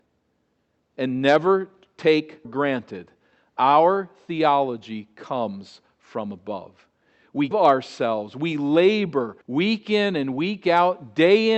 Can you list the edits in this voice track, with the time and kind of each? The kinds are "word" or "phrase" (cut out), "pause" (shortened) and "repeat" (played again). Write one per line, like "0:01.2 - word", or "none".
0:02.4 - word
0:07.5 - word
0:09.4 - pause